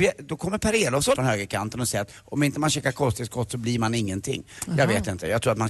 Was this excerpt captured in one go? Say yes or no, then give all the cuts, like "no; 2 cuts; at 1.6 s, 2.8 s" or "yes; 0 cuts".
no; 1 cut; at 1.2 s